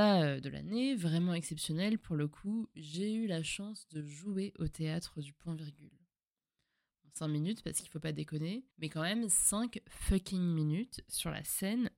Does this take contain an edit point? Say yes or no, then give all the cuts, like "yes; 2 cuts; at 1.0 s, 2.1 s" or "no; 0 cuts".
yes; 1 cut; at 8.7 s